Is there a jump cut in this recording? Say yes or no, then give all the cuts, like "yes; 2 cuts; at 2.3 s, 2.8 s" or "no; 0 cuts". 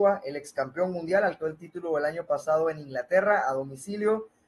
yes; 1 cut; at 1.4 s